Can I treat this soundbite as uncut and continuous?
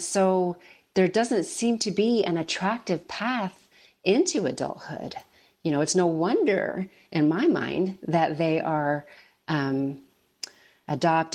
yes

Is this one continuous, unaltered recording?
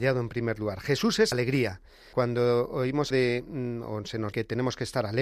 no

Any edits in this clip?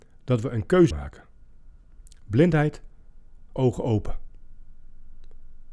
yes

